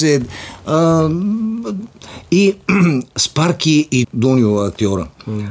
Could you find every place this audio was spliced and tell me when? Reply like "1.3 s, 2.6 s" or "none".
3.1 s, 4.0 s